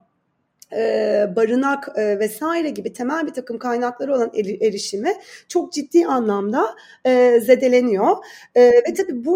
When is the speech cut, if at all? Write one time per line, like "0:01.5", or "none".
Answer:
none